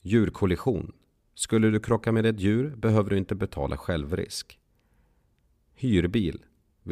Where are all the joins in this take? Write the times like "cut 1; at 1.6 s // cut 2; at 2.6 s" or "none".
none